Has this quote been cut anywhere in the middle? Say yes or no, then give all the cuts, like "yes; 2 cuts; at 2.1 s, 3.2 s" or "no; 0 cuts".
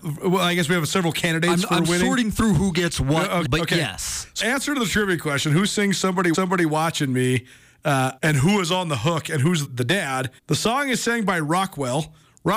yes; 6 cuts; at 3.4 s, 4.4 s, 6.3 s, 8.2 s, 9.6 s, 10.4 s